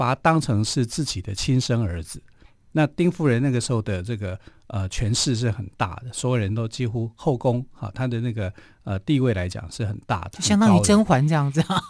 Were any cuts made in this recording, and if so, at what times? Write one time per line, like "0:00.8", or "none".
none

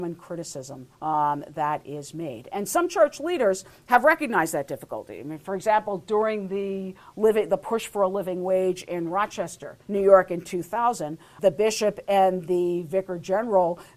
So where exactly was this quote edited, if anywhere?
0:00.9
0:09.8
0:11.4

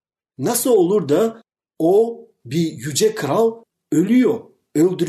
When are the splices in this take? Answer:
none

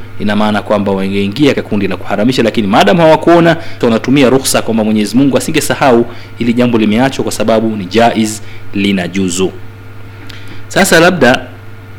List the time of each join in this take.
0:01.5
0:03.8

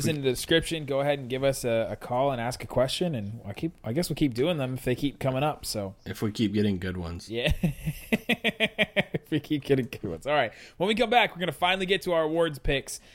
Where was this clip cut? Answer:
none

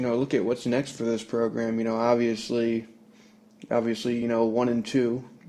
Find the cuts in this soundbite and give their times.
none

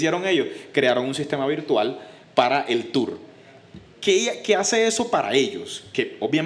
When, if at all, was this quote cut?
none

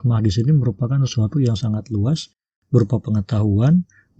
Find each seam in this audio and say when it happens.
none

